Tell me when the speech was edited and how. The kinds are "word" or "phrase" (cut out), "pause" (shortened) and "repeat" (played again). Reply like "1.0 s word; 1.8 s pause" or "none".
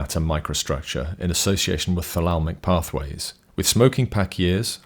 3.5 s pause